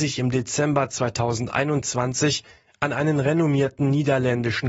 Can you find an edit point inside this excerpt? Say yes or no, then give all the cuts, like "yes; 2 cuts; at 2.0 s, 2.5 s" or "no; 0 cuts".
no; 0 cuts